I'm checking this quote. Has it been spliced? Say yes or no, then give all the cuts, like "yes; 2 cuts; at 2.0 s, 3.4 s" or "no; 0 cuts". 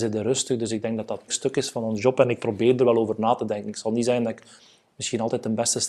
yes; 1 cut; at 1.3 s